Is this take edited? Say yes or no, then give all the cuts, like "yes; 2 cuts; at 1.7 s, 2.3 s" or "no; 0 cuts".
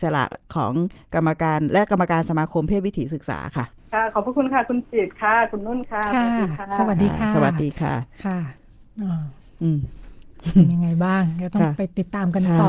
yes; 1 cut; at 3.8 s